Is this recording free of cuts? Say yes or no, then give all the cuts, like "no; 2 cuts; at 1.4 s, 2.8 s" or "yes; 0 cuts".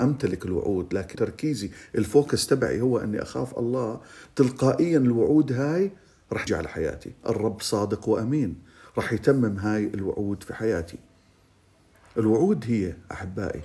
no; 2 cuts; at 1.1 s, 6.5 s